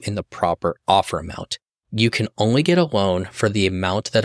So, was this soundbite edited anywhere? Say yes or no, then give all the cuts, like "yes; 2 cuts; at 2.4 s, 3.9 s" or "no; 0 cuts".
no; 0 cuts